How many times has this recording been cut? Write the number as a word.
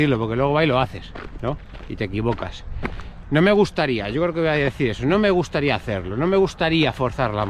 zero